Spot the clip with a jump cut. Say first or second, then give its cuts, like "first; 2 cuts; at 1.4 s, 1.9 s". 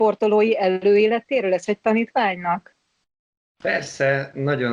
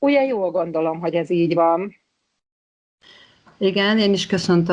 first; 1 cut; at 1.7 s